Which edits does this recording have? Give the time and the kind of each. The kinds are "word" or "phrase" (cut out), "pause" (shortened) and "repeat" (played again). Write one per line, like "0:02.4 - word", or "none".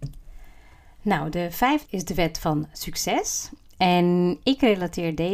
0:01.9 - word